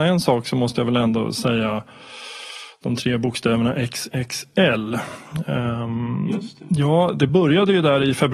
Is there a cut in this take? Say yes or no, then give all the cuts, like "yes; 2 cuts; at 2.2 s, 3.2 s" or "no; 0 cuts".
no; 0 cuts